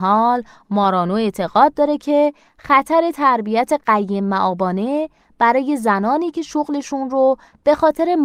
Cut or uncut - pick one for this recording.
uncut